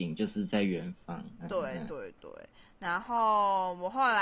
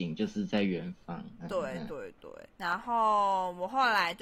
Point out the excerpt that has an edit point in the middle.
second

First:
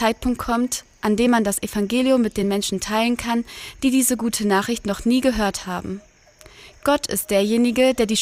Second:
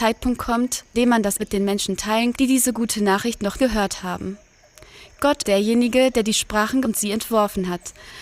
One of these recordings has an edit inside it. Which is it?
second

